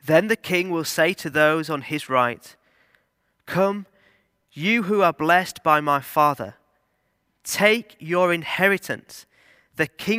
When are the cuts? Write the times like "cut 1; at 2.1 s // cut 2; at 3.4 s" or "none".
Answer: none

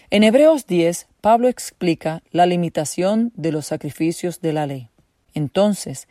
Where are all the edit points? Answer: none

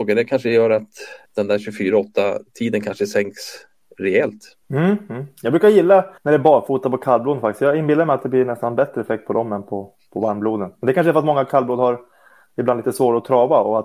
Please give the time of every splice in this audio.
cut 1; at 1.3 s // cut 2; at 4.6 s // cut 3; at 6.2 s

